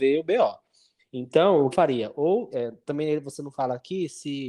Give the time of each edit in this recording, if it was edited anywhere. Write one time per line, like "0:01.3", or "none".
0:01.0
0:01.7
0:02.5